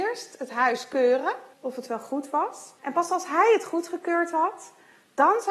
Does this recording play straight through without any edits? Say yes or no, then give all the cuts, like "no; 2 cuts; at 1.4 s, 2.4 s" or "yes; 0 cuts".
no; 2 cuts; at 1.5 s, 2.8 s